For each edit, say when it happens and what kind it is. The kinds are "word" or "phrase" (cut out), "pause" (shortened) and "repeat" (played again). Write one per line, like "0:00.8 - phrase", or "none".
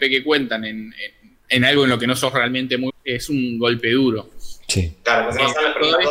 0:02.9 - word